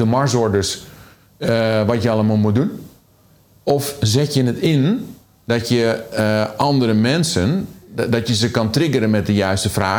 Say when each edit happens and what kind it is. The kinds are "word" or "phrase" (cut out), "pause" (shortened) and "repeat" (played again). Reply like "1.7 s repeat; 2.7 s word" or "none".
none